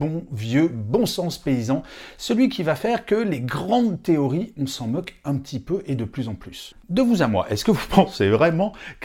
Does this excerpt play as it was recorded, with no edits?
no; 1 cut; at 6.8 s

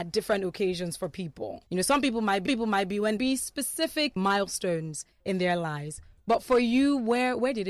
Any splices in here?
yes; 5 cuts; at 1.7 s, 2.5 s, 3.2 s, 4.2 s, 5.1 s

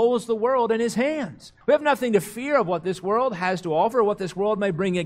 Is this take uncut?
no; 1 cut; at 1.6 s

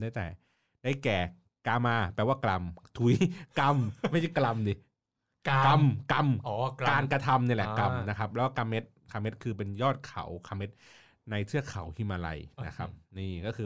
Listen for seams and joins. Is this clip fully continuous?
yes; 0 cuts

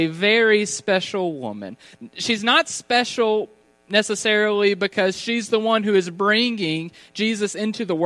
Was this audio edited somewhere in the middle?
no; 0 cuts

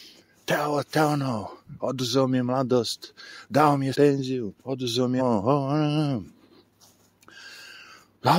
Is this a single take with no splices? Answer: no; 3 cuts; at 3.9 s, 4.6 s, 5.2 s

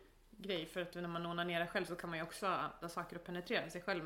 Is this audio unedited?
no; 1 cut; at 2.8 s

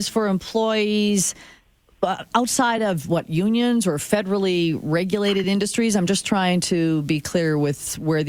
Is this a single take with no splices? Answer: yes; 0 cuts

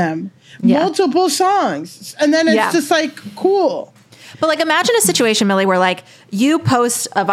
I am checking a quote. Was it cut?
no; 0 cuts

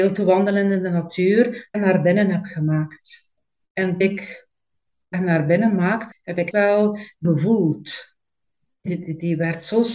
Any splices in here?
yes; 7 cuts; at 1.7 s, 4.0 s, 5.1 s, 6.1 s, 6.5 s, 7.2 s, 8.9 s

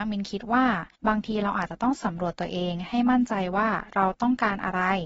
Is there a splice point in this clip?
yes; 1 cut; at 1.0 s

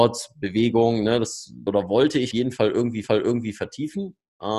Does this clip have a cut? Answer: yes; 3 cuts; at 1.7 s, 2.3 s, 3.0 s

